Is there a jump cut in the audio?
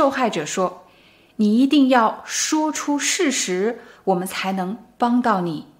no; 0 cuts

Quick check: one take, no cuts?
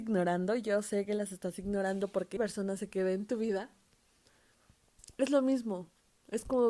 no; 1 cut; at 2.4 s

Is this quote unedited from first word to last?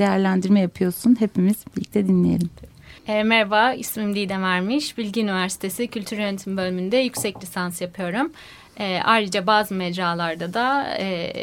no; 1 cut; at 3.0 s

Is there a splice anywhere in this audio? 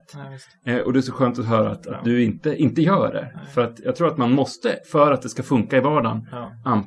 yes; 1 cut; at 4.8 s

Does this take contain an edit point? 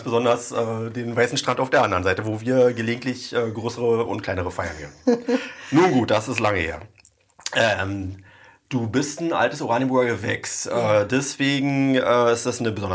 no; 0 cuts

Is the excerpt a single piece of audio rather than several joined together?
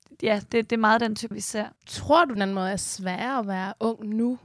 no; 3 cuts; at 1.3 s, 1.8 s, 2.4 s

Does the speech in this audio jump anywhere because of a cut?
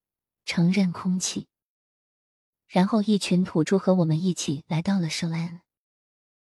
no; 0 cuts

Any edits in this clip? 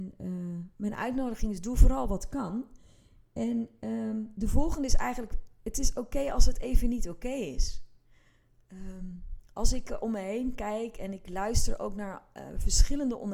no; 0 cuts

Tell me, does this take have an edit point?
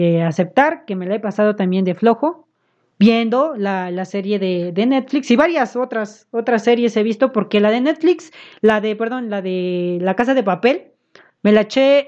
no; 0 cuts

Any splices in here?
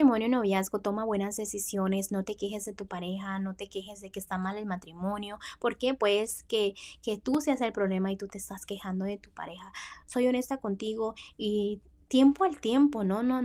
no; 0 cuts

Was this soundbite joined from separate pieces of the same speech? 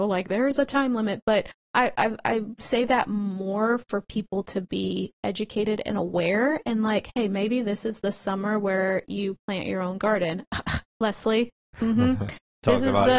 no; 0 cuts

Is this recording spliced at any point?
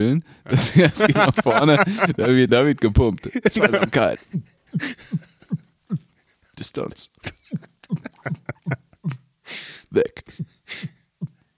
yes; 3 cuts; at 1.1 s, 2.5 s, 9.8 s

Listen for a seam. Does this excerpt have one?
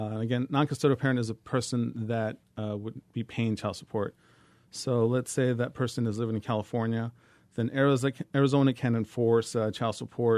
no; 0 cuts

